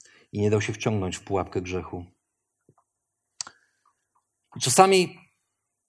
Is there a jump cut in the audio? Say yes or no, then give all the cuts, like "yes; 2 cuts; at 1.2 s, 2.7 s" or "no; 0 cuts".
no; 0 cuts